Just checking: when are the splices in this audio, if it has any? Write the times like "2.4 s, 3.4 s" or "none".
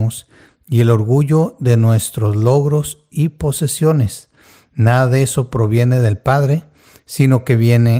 none